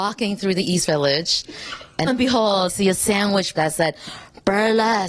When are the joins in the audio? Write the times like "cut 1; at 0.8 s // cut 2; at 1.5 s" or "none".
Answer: cut 1; at 2.1 s // cut 2; at 2.7 s // cut 3; at 3.6 s